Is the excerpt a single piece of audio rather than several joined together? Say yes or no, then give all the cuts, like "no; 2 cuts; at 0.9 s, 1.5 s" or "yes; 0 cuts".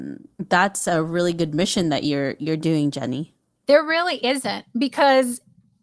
yes; 0 cuts